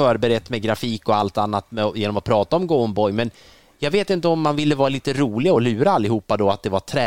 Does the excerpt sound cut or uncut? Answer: uncut